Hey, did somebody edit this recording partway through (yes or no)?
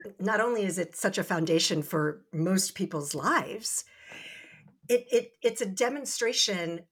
no